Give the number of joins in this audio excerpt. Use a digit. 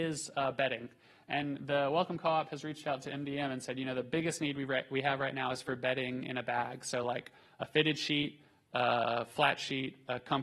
0